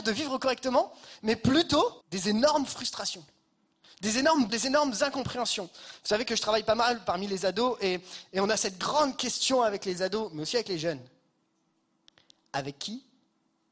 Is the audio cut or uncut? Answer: cut